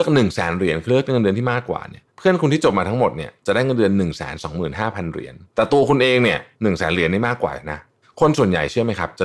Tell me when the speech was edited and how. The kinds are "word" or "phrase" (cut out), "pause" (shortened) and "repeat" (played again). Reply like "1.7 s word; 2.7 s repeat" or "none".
2.1 s pause; 5.5 s pause; 6.5 s pause; 8.0 s pause